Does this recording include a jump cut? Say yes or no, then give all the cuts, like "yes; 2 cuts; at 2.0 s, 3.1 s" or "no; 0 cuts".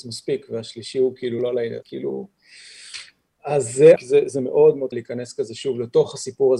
yes; 4 cuts; at 1.4 s, 1.8 s, 4.0 s, 4.9 s